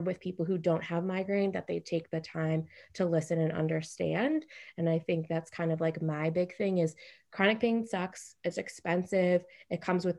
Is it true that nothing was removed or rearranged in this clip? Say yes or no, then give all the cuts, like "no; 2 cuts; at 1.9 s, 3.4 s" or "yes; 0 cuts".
yes; 0 cuts